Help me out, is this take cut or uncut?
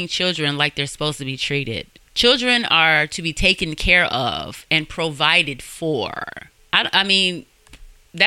cut